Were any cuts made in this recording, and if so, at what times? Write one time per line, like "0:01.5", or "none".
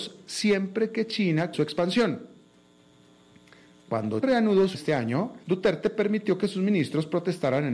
0:01.5
0:04.2
0:04.7
0:05.4